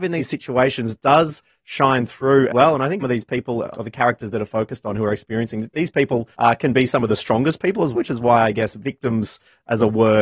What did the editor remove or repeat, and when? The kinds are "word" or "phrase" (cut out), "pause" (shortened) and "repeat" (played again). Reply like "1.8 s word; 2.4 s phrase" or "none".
2.5 s word; 3.0 s word; 3.7 s word; 6.3 s pause; 7.9 s word